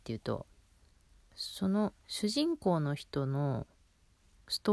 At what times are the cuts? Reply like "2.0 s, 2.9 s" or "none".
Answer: 2.0 s